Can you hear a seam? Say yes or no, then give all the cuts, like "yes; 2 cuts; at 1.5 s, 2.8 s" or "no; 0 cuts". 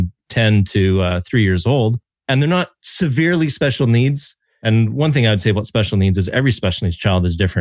no; 0 cuts